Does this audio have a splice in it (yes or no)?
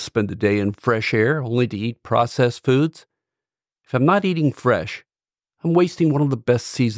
no